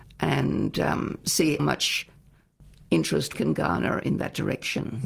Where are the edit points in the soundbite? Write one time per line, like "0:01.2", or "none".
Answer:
0:01.6
0:03.3